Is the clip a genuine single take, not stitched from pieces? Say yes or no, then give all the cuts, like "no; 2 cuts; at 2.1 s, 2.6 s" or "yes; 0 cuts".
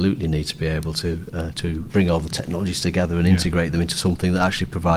yes; 0 cuts